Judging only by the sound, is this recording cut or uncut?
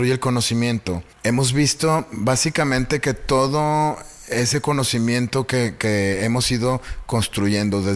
cut